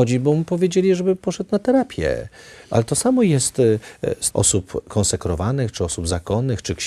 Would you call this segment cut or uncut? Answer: cut